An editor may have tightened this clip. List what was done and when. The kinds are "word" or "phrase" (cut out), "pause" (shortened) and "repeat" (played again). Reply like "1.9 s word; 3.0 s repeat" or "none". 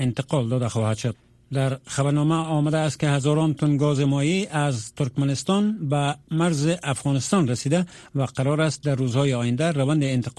none